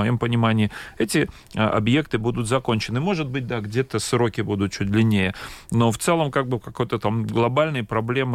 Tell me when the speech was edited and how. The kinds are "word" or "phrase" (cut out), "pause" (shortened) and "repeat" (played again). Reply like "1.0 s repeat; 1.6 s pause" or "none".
none